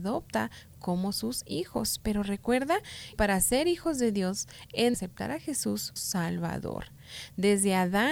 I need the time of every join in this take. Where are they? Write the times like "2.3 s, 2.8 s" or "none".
3.1 s, 4.9 s, 6.0 s

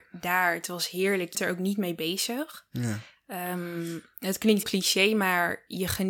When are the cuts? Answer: 1.3 s, 4.6 s

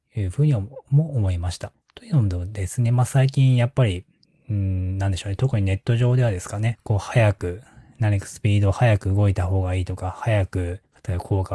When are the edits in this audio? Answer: 1.8 s

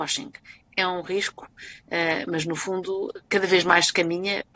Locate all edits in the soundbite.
none

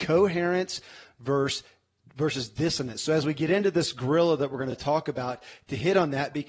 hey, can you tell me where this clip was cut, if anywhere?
none

